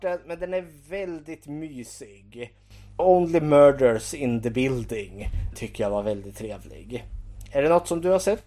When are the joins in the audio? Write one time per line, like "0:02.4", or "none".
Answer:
0:03.0
0:05.5